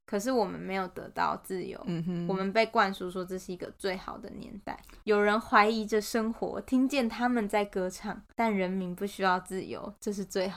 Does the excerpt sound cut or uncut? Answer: cut